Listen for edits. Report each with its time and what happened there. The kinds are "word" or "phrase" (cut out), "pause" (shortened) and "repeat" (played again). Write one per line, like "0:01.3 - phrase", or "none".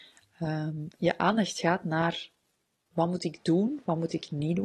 none